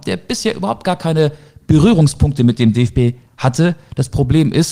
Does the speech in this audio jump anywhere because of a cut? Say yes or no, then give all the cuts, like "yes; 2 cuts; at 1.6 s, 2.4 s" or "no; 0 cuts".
no; 0 cuts